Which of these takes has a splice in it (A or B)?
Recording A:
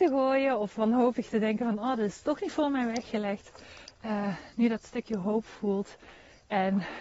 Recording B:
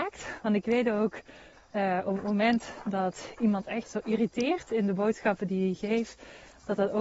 B